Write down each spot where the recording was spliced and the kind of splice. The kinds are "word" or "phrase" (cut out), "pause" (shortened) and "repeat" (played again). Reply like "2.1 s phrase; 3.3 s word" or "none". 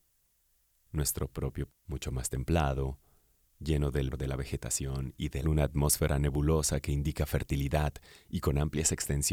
1.7 s word; 4.1 s word; 5.4 s phrase